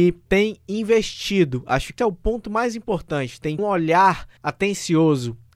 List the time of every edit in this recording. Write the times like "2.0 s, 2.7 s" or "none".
2.0 s, 3.6 s, 4.4 s